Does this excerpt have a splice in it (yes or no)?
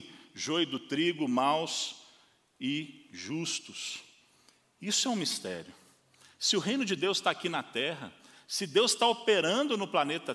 no